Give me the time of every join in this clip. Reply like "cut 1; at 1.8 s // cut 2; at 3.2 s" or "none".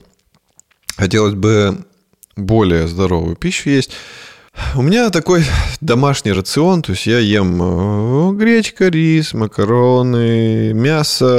none